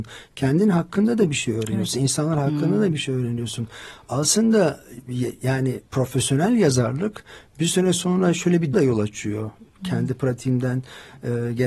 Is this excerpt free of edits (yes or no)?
no